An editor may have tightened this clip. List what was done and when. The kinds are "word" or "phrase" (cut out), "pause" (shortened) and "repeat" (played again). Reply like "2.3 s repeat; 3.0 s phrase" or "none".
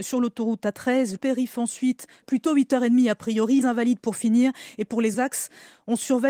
1.2 s word; 2.2 s word; 3.6 s word; 5.1 s word